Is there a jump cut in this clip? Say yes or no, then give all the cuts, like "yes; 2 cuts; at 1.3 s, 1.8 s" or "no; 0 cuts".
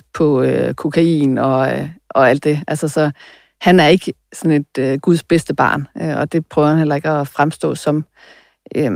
no; 0 cuts